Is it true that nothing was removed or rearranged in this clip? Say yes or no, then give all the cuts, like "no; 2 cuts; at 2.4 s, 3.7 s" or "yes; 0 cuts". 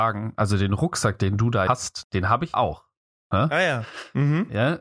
no; 3 cuts; at 1.7 s, 2.0 s, 2.5 s